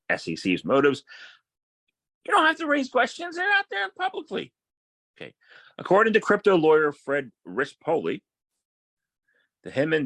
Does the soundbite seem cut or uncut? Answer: uncut